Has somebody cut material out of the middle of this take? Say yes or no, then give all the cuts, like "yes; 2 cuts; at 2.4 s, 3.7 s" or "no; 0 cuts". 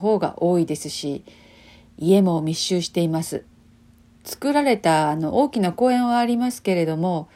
no; 0 cuts